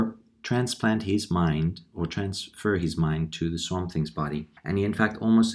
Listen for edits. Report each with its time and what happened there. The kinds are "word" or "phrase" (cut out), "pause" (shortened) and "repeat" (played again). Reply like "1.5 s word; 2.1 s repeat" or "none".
4.6 s pause